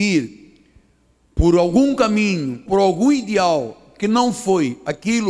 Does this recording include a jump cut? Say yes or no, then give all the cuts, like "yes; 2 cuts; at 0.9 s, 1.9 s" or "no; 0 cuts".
yes; 1 cut; at 2.7 s